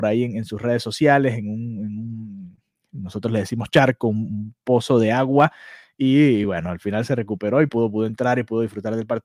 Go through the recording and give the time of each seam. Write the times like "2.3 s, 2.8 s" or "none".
none